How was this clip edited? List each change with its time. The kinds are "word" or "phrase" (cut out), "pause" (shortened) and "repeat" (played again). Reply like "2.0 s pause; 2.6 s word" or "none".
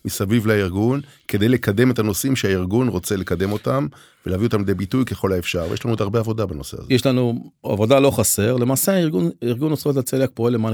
none